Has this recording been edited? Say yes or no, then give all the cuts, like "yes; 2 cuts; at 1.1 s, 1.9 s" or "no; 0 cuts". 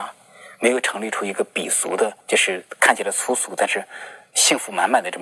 yes; 1 cut; at 2.2 s